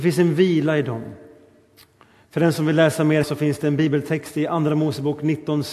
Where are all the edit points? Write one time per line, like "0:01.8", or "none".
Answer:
0:03.2